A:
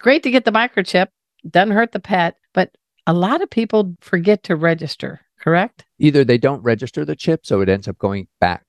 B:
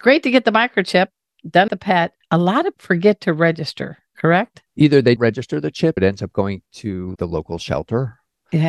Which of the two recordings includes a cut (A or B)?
B